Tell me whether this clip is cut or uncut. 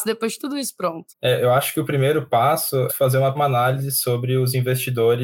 cut